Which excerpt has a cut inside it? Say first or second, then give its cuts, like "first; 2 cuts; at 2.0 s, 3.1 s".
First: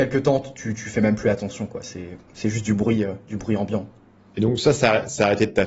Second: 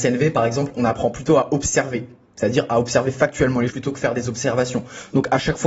second; 1 cut; at 3.7 s